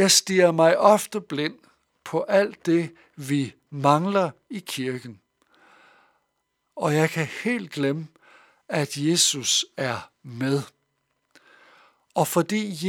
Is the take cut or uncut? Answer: uncut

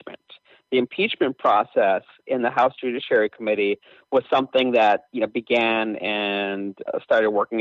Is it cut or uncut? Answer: uncut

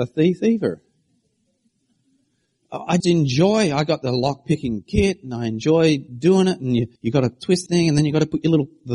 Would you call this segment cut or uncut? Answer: cut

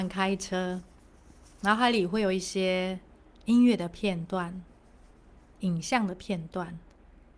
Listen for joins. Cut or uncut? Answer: uncut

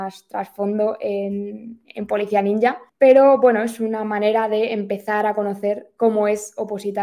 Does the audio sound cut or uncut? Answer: cut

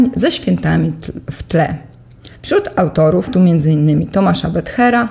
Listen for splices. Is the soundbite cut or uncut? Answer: cut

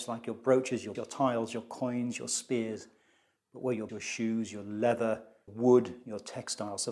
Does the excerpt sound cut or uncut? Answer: cut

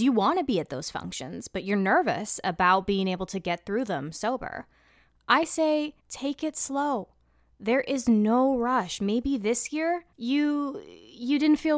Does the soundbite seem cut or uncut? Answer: cut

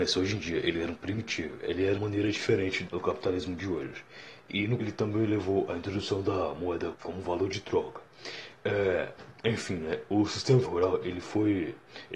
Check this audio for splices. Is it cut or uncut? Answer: cut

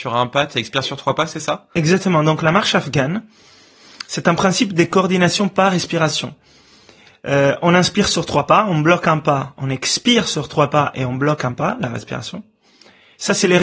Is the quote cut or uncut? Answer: uncut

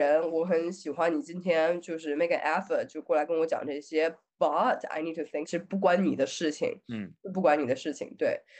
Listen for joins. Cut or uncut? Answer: cut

